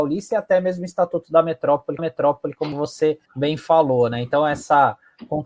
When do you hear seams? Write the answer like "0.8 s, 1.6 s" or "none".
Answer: 2.0 s, 3.3 s